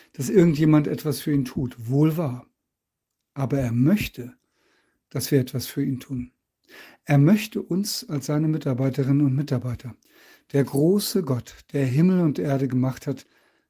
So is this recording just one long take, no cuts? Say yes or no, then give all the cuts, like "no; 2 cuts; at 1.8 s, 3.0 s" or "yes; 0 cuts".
yes; 0 cuts